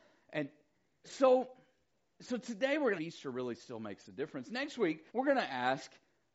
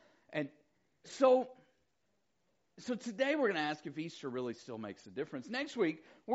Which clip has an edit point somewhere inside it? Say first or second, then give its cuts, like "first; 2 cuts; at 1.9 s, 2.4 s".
first; 3 cuts; at 1.9 s, 3.0 s, 5.1 s